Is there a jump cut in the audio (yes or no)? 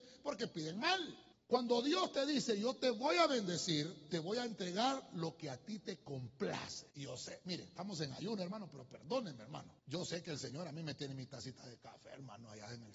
yes